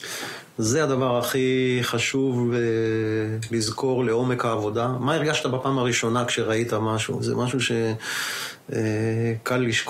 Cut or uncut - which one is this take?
uncut